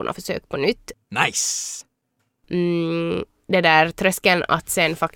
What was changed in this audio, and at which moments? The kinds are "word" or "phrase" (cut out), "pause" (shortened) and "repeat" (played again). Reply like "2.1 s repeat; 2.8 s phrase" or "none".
none